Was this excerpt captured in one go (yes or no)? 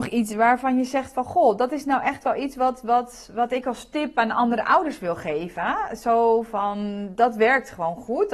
yes